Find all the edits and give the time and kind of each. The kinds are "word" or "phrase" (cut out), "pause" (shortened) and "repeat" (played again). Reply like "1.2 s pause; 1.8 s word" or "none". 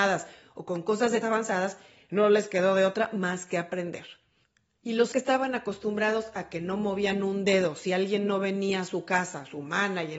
1.2 s phrase; 5.1 s word